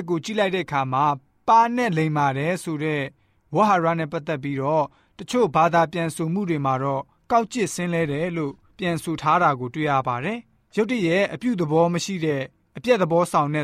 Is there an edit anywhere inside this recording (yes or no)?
no